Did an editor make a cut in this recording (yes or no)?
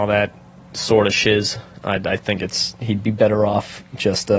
no